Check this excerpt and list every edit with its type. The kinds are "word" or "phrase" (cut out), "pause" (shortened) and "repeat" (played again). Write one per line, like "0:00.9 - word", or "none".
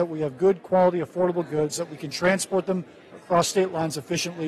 none

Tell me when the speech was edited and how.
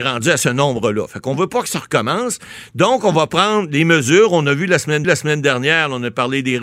0:05.0 - repeat

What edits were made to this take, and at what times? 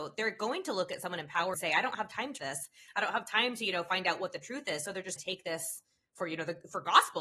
0:01.5 - word
0:02.4 - word
0:05.2 - word

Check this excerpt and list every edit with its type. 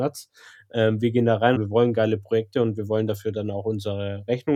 0:01.6 - phrase

